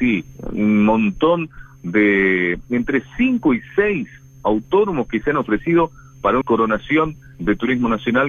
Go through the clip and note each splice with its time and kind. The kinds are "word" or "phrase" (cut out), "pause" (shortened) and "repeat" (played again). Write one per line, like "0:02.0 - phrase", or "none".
0:06.4 - word